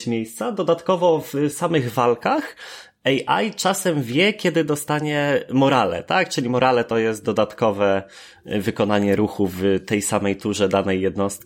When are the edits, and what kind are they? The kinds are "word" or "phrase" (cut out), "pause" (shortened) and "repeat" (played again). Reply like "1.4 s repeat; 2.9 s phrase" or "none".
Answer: none